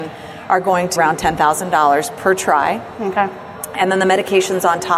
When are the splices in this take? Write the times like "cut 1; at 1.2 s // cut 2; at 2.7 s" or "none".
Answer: cut 1; at 1.0 s